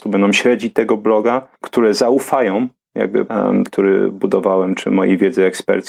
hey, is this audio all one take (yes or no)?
no